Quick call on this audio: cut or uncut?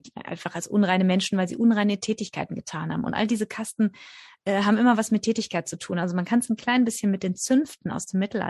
uncut